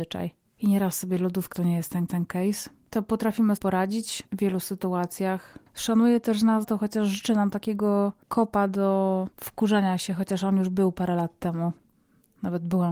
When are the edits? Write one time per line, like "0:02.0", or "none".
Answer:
0:01.5
0:02.1
0:03.6
0:04.3
0:06.6
0:08.2
0:09.3